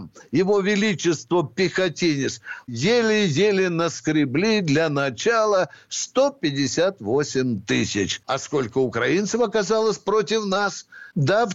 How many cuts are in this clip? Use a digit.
0